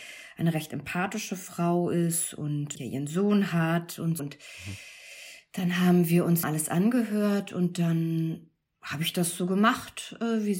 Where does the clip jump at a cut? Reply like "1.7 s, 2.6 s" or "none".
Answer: 2.8 s, 4.2 s, 6.4 s